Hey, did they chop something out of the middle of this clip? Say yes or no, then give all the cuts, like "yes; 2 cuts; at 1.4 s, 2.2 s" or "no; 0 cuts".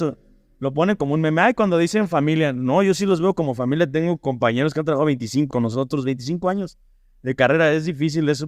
yes; 1 cut; at 5.5 s